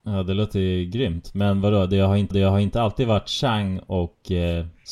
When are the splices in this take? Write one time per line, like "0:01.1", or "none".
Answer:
0:02.3